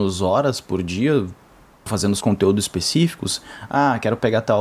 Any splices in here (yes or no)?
yes